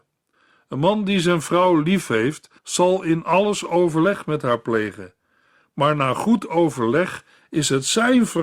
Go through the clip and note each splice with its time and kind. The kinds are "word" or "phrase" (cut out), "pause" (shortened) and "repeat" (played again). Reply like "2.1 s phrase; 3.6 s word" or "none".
2.6 s pause